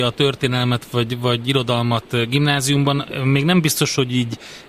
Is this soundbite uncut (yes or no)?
yes